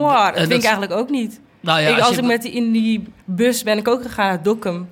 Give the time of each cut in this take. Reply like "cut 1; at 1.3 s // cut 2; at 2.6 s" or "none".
cut 1; at 3.2 s

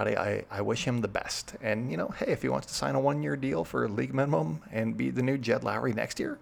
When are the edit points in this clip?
none

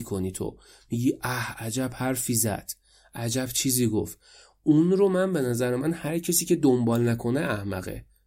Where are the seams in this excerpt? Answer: none

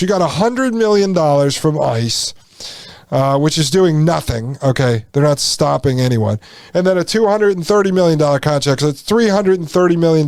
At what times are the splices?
none

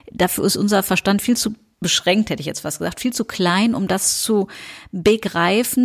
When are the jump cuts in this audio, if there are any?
none

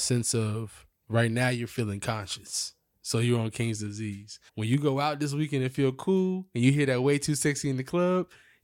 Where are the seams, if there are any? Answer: cut 1; at 4.5 s

